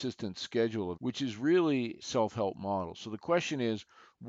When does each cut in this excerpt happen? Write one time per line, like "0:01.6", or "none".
0:01.0
0:02.0